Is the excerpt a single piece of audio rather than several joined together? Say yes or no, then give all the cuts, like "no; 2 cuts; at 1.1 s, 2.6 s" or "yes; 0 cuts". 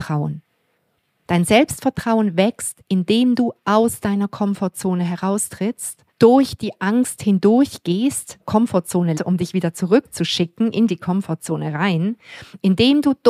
no; 3 cuts; at 6.1 s, 8.4 s, 9.1 s